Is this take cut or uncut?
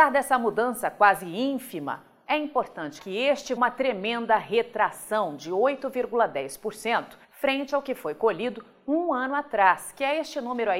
cut